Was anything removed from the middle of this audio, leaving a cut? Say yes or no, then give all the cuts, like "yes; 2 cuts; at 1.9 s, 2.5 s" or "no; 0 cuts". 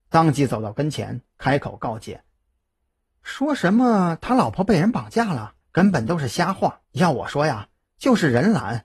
yes; 2 cuts; at 5.6 s, 6.8 s